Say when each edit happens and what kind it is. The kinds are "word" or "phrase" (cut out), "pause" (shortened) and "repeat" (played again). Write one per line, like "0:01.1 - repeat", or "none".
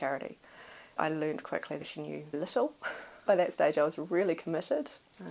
0:01.0 - word
0:01.4 - word
0:01.8 - word
0:02.3 - word
0:03.3 - word